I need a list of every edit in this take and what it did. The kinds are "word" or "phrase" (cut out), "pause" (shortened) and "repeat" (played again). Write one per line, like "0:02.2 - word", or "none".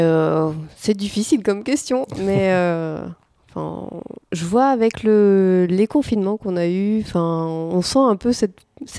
0:04.2 - pause